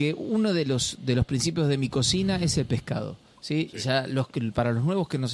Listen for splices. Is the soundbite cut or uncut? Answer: uncut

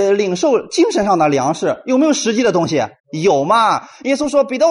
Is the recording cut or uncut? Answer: cut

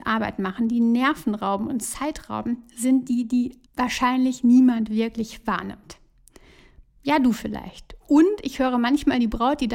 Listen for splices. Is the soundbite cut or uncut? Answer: cut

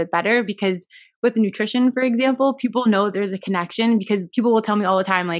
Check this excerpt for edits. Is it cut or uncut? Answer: uncut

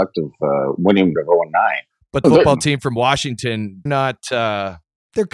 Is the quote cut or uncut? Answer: cut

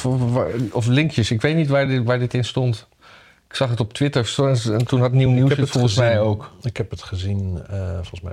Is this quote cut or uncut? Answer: uncut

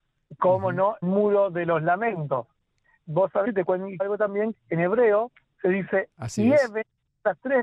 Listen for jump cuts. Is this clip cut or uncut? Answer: cut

